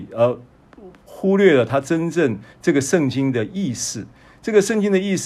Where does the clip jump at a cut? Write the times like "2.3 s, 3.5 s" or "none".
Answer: 2.5 s